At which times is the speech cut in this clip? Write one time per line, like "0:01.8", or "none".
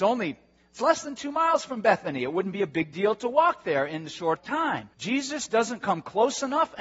0:04.3
0:04.9